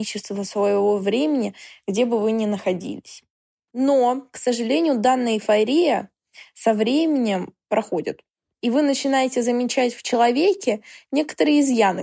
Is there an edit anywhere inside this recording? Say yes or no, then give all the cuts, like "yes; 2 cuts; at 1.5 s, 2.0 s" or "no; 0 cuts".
no; 0 cuts